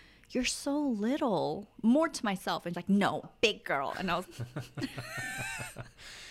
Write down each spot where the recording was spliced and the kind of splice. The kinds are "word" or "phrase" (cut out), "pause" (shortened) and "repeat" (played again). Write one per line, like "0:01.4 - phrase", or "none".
0:02.7 - word
0:03.2 - word
0:04.2 - word